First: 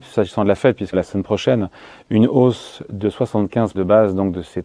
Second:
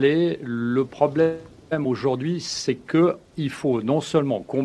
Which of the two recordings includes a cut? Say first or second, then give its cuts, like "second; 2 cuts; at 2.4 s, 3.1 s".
first; 2 cuts; at 0.9 s, 3.7 s